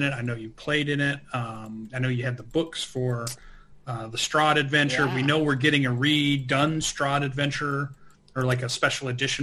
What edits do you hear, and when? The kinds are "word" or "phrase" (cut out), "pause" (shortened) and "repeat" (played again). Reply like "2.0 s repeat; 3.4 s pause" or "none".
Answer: none